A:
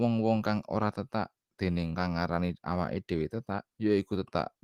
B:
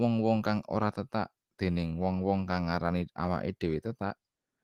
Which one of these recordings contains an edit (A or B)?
A